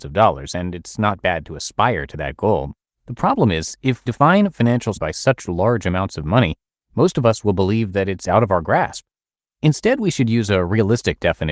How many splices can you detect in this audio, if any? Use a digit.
2